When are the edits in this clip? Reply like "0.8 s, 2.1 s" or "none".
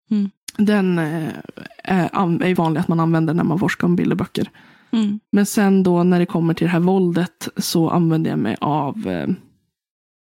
2.6 s, 5.3 s